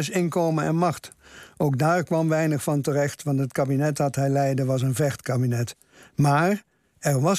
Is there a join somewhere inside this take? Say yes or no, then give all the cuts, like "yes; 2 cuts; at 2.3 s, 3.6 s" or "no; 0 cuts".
no; 0 cuts